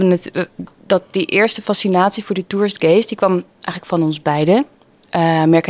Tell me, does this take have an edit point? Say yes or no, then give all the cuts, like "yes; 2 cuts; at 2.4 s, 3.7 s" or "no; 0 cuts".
no; 0 cuts